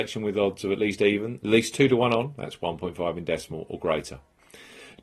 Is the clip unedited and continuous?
yes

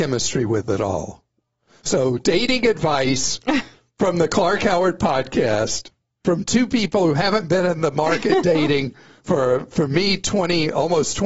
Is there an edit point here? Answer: no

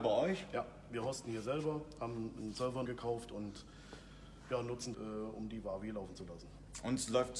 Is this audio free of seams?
no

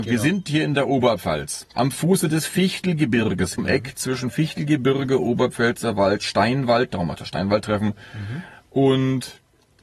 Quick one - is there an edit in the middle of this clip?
yes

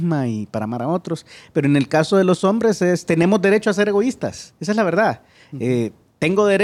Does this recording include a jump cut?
yes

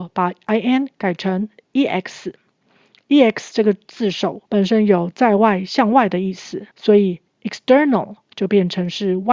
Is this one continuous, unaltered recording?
no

